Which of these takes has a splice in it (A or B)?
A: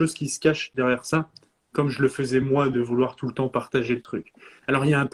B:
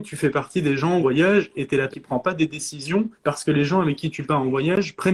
B